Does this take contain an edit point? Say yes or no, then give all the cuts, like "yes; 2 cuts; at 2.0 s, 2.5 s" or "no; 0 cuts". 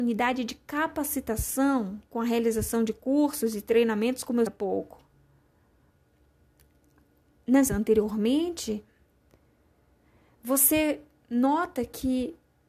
yes; 2 cuts; at 4.5 s, 7.7 s